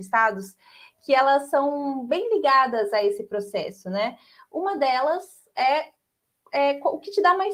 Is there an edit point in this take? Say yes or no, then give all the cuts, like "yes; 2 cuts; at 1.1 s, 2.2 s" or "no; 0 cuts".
no; 0 cuts